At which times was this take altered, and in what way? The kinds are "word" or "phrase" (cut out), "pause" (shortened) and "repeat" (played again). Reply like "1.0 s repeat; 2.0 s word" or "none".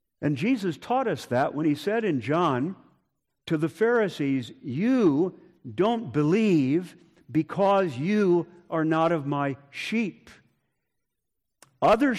none